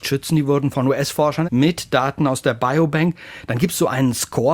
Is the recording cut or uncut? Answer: cut